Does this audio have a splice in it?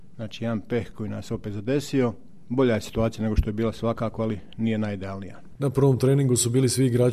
no; 0 cuts

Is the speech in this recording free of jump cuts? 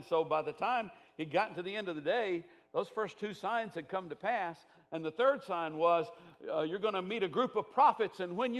yes; 0 cuts

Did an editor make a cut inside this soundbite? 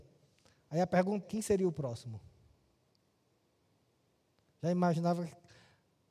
yes; 1 cut; at 1.2 s

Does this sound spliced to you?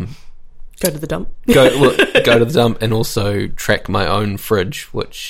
no; 0 cuts

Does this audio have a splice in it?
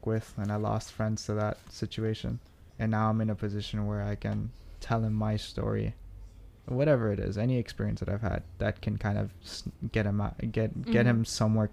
yes; 2 cuts; at 2.7 s, 6.6 s

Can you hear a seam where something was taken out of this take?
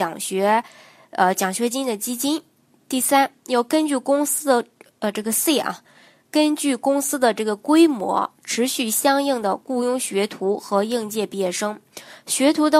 no; 0 cuts

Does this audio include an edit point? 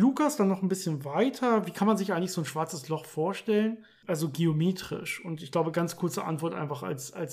no; 0 cuts

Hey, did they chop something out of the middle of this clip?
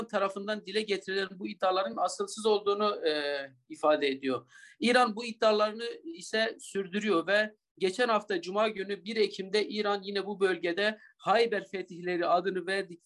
no; 0 cuts

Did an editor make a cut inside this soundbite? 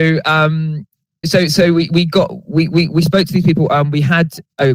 yes; 2 cuts; at 1.2 s, 1.9 s

